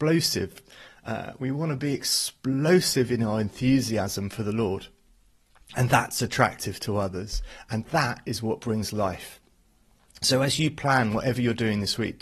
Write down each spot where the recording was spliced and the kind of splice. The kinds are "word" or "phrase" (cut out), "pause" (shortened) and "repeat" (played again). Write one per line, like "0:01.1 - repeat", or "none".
none